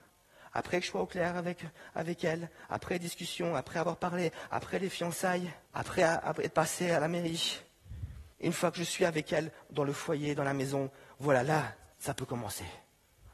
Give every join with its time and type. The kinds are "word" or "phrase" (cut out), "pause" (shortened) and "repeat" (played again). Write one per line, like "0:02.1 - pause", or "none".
0:05.6 - pause
0:08.3 - pause
0:11.9 - pause